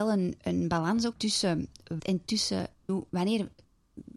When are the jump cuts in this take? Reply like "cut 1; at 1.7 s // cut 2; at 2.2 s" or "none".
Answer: cut 1; at 1.1 s // cut 2; at 2.0 s // cut 3; at 2.9 s